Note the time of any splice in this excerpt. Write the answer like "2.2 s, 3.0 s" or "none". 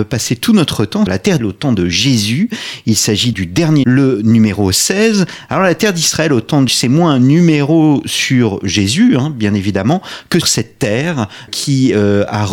1.1 s, 1.4 s, 3.3 s, 3.8 s, 6.7 s, 10.4 s, 11.5 s

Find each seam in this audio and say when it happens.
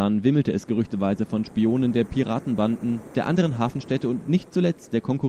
none

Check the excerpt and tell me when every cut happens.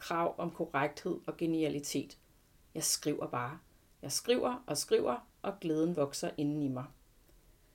none

